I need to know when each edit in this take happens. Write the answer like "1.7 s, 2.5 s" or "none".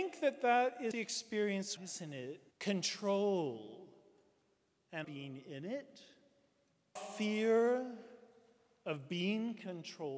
0.9 s, 1.8 s, 2.5 s, 5.0 s, 7.0 s